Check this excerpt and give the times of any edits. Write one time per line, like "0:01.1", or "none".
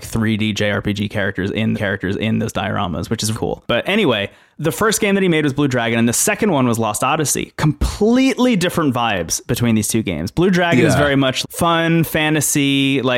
0:01.7
0:03.3
0:11.4